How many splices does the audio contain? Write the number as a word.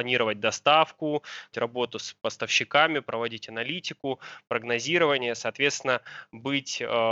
one